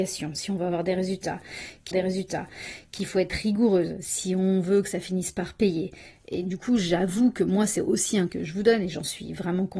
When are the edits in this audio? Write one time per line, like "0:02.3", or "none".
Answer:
0:01.9
0:08.3